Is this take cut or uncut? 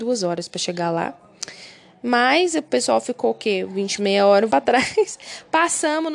cut